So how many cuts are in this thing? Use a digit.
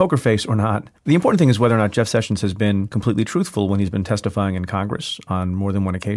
1